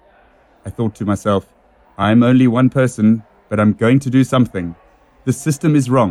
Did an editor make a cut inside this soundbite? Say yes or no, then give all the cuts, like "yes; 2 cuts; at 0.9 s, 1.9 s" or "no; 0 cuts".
no; 0 cuts